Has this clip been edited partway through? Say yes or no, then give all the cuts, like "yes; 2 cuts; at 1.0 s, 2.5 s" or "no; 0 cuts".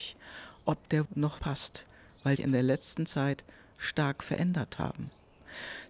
yes; 3 cuts; at 1.1 s, 1.4 s, 2.4 s